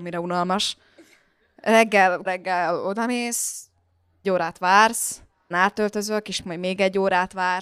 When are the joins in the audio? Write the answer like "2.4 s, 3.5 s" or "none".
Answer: 2.3 s, 4.2 s, 5.5 s, 6.4 s